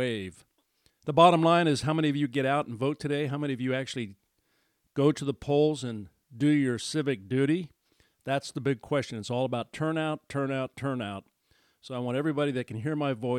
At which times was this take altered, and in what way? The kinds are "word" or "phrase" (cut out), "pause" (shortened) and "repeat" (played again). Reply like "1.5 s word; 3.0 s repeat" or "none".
none